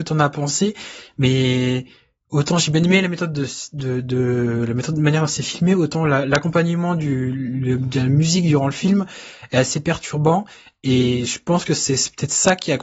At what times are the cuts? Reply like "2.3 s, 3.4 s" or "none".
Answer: none

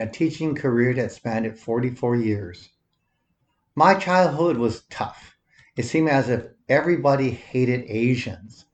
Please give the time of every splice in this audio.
none

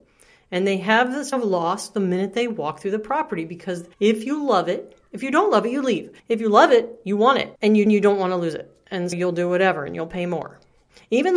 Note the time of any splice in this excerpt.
1.3 s, 3.9 s, 6.2 s, 7.6 s, 7.9 s, 9.1 s

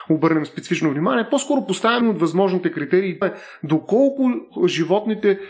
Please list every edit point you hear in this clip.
2.0 s, 3.2 s

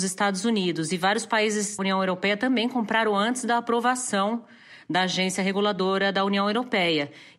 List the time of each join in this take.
1.8 s

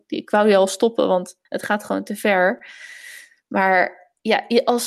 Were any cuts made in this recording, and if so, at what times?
1.5 s

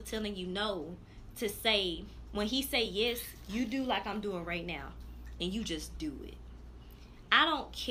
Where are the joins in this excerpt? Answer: none

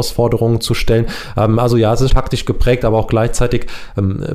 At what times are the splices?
2.1 s

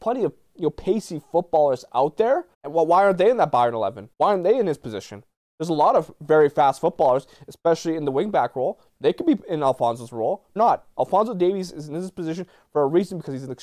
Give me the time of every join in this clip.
2.5 s, 4.1 s, 10.6 s

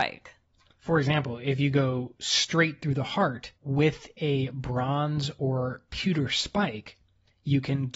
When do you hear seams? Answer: 3.6 s

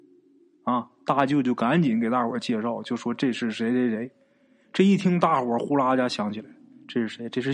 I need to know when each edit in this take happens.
none

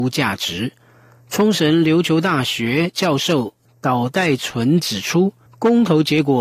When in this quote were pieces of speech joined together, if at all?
5.5 s

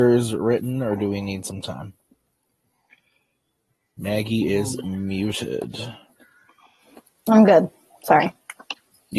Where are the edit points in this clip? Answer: none

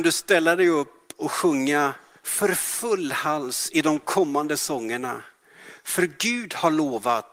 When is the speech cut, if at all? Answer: none

